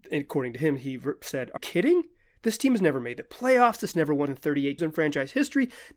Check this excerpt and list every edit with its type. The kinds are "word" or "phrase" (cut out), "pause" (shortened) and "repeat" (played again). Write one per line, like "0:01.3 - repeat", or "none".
0:01.6 - word
0:03.9 - word
0:04.3 - word
0:04.8 - word